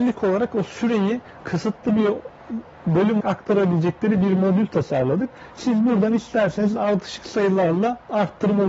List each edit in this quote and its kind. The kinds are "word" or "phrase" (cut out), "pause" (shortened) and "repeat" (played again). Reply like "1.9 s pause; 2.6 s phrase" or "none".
3.2 s word